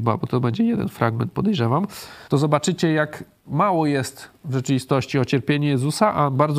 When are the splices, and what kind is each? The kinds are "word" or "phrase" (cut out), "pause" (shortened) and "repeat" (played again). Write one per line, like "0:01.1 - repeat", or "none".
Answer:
0:02.3 - pause